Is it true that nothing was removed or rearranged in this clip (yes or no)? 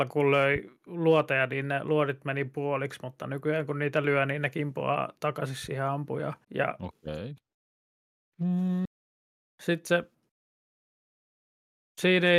no